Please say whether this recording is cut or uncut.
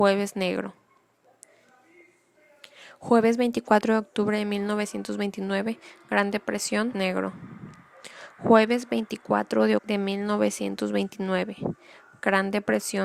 cut